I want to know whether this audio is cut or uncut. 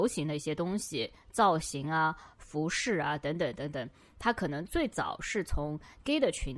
uncut